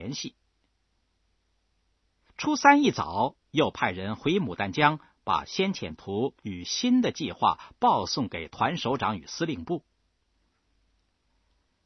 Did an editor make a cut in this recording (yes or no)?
yes